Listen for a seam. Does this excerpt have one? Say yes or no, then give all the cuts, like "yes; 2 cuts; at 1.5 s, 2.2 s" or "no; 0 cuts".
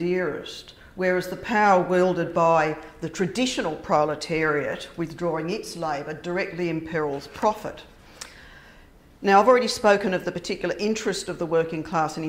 no; 0 cuts